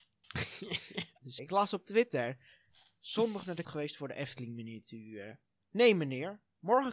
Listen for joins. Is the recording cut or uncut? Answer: cut